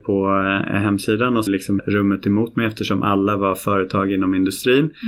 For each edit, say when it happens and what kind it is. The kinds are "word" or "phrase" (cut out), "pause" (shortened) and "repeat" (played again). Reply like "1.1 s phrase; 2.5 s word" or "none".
1.5 s phrase; 1.8 s word